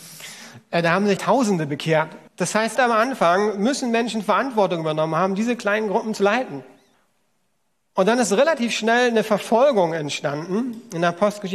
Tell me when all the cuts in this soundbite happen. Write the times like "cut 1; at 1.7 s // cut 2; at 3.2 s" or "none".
cut 1; at 1.2 s // cut 2; at 2.3 s // cut 3; at 2.8 s // cut 4; at 6.9 s